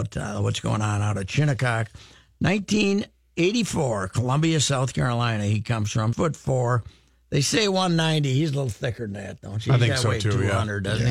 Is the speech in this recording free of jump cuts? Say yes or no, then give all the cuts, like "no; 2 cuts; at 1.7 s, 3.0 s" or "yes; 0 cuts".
no; 1 cut; at 6.1 s